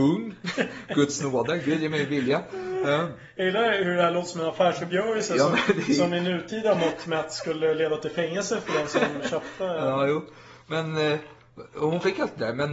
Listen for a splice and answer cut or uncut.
uncut